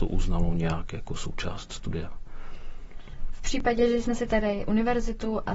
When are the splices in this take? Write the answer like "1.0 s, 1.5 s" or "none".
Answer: 4.6 s